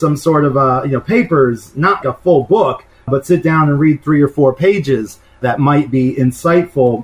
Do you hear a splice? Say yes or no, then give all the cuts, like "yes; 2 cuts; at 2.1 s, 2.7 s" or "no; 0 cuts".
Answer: yes; 1 cut; at 2.0 s